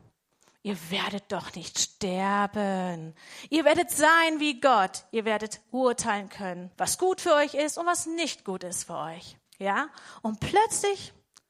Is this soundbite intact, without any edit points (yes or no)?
no